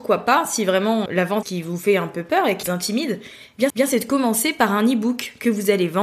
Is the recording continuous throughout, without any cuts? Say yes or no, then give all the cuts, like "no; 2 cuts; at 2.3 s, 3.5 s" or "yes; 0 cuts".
no; 4 cuts; at 1.1 s, 1.4 s, 2.6 s, 3.7 s